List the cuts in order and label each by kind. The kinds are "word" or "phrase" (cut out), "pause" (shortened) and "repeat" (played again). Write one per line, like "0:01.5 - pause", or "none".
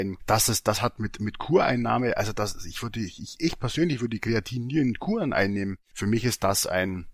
none